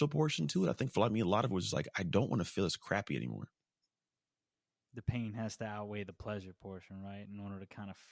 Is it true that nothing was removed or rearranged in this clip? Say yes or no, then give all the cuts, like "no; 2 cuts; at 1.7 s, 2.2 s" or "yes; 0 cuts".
yes; 0 cuts